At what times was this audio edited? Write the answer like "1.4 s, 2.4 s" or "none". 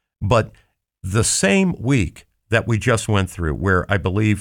none